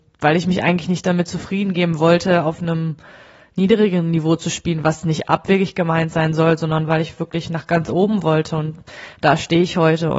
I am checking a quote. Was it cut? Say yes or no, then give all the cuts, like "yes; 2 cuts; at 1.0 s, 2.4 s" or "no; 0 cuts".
no; 0 cuts